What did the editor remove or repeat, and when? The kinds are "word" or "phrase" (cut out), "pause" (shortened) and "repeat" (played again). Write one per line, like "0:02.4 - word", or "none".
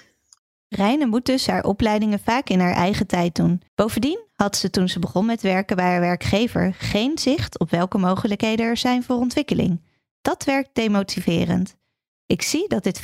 0:03.7 - pause